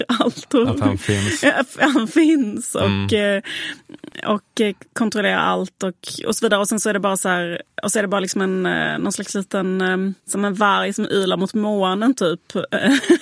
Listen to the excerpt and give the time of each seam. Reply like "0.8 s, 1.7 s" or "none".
10.2 s